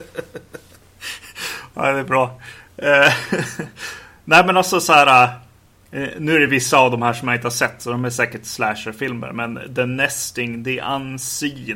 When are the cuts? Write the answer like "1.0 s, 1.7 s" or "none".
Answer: none